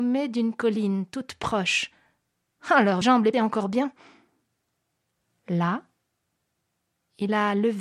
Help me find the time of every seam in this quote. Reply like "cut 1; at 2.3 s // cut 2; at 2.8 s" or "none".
cut 1; at 3.0 s // cut 2; at 3.3 s